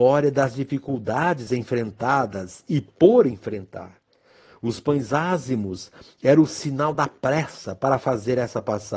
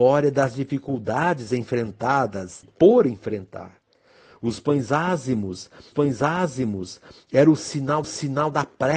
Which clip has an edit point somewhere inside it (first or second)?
second